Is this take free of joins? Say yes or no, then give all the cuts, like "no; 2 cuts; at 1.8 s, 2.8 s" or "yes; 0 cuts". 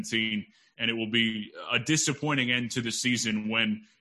yes; 0 cuts